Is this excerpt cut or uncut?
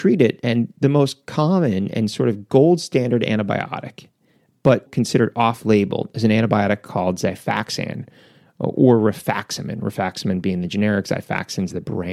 cut